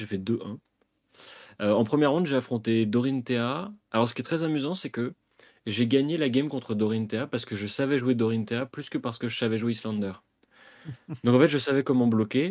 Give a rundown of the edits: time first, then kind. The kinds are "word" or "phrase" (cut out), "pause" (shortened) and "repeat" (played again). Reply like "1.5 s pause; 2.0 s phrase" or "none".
none